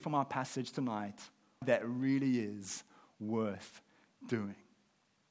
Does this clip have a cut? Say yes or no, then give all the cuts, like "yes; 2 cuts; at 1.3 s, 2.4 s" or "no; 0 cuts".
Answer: yes; 1 cut; at 1.6 s